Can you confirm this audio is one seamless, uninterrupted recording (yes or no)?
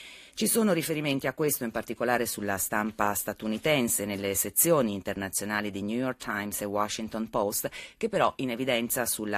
yes